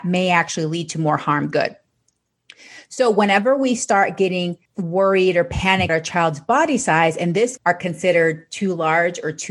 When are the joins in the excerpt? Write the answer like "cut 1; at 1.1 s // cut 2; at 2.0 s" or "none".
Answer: cut 1; at 1.5 s // cut 2; at 4.7 s // cut 3; at 5.9 s // cut 4; at 7.6 s